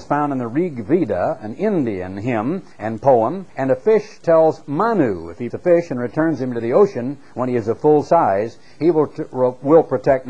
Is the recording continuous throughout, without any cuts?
no; 3 cuts; at 2.7 s, 3.5 s, 5.5 s

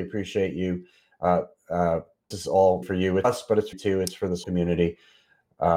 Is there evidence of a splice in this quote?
yes; 5 cuts; at 2.3 s, 2.8 s, 3.2 s, 3.7 s, 4.4 s

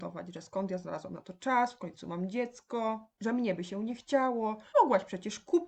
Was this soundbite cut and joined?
yes; 1 cut; at 4.7 s

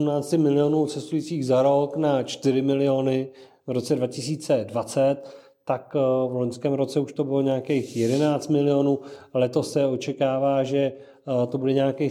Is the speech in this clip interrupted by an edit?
no; 0 cuts

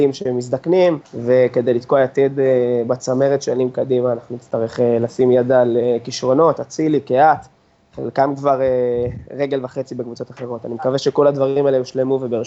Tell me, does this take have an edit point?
no; 0 cuts

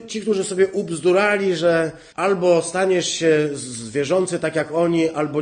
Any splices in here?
yes; 1 cut; at 2.1 s

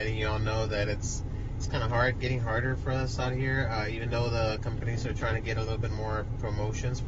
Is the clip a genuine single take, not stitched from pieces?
yes; 0 cuts

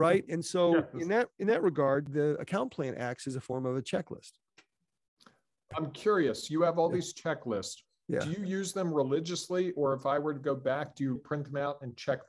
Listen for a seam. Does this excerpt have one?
yes; 1 cut; at 11.2 s

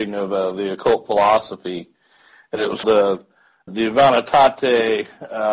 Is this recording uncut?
no; 2 cuts; at 2.8 s, 3.7 s

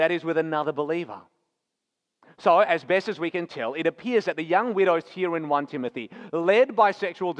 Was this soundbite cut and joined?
no; 0 cuts

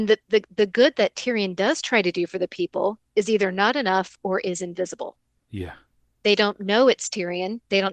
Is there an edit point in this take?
no; 0 cuts

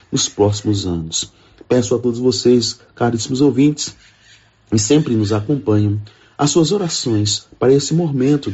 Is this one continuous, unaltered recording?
yes; 0 cuts

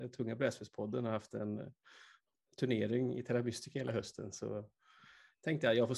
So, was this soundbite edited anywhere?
no; 0 cuts

